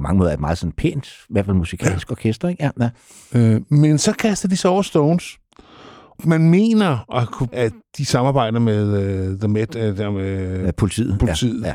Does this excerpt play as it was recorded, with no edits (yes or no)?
no